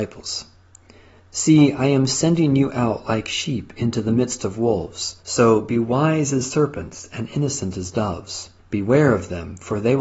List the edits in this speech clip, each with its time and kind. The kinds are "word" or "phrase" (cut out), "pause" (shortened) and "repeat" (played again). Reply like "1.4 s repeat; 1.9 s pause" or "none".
5.2 s pause; 8.6 s pause